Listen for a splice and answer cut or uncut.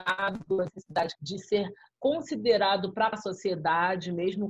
cut